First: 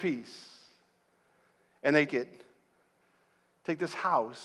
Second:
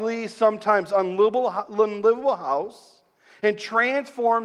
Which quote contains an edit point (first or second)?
first